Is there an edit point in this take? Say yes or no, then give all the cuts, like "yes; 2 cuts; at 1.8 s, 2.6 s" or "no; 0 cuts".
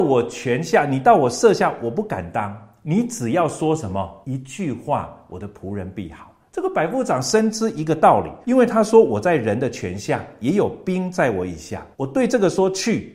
yes; 3 cuts; at 4.2 s, 8.4 s, 11.9 s